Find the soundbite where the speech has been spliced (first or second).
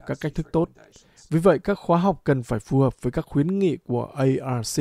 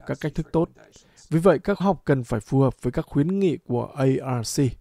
second